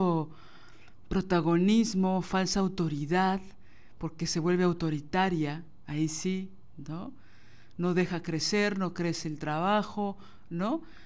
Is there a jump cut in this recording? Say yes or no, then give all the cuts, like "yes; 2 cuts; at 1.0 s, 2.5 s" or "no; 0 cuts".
no; 0 cuts